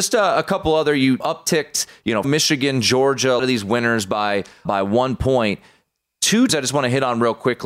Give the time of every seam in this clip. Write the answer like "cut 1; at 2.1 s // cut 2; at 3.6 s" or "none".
cut 1; at 1.2 s // cut 2; at 2.2 s // cut 3; at 3.4 s // cut 4; at 4.7 s // cut 5; at 6.5 s